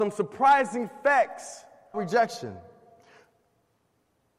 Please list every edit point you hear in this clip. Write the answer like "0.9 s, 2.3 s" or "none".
1.9 s